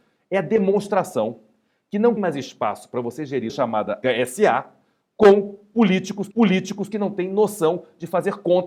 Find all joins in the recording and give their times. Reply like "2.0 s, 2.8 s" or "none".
2.2 s, 3.5 s, 4.0 s, 6.3 s